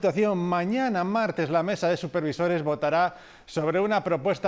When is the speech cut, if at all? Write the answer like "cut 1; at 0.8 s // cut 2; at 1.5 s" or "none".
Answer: none